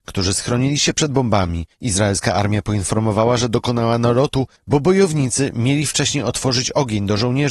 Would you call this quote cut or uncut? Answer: cut